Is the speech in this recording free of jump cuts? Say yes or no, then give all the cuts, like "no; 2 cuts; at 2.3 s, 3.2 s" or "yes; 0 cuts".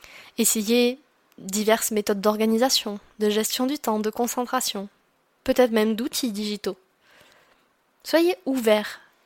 yes; 0 cuts